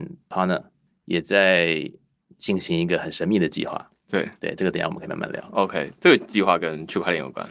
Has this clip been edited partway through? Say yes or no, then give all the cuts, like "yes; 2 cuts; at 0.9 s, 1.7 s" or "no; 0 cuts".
no; 0 cuts